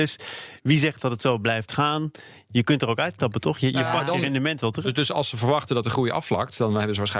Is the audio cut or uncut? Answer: uncut